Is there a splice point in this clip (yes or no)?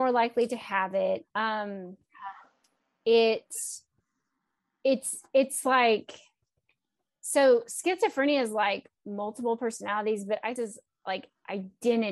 yes